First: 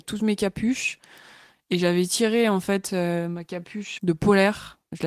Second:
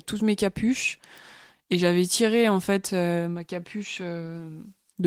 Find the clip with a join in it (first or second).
first